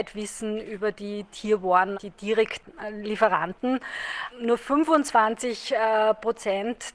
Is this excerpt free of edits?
no; 2 cuts; at 1.9 s, 4.3 s

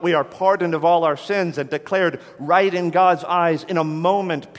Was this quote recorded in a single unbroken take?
yes; 0 cuts

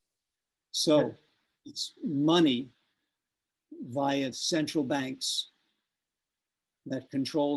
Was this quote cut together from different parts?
yes; 1 cut; at 4.3 s

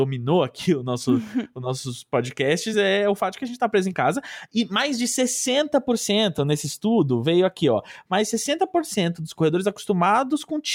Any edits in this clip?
no; 0 cuts

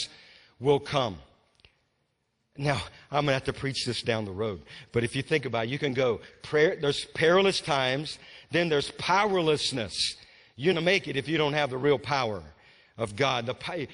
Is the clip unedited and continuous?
no; 1 cut; at 10.7 s

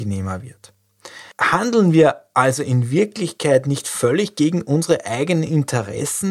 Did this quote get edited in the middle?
yes; 1 cut; at 1.3 s

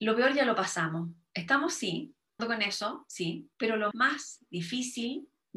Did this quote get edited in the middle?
yes; 3 cuts; at 2.4 s, 3.5 s, 3.9 s

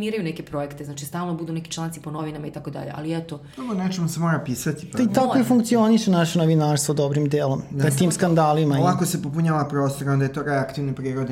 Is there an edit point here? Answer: no; 0 cuts

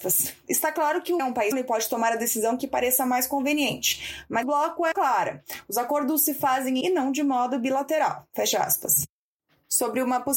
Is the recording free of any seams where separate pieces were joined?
no; 5 cuts; at 1.2 s, 1.5 s, 4.4 s, 4.9 s, 6.8 s

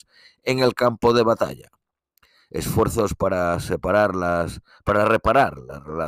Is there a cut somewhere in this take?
no; 0 cuts

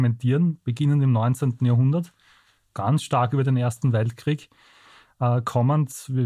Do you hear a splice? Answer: no; 0 cuts

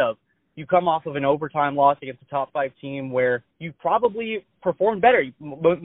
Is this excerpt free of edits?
no; 1 cut; at 3.5 s

